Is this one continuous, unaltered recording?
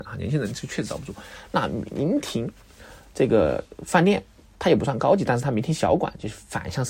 yes; 0 cuts

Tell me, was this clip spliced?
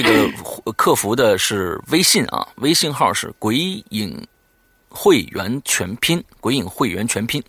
no; 0 cuts

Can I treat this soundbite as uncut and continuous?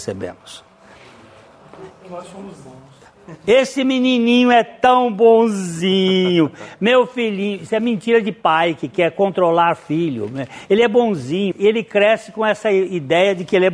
no; 1 cut; at 11.5 s

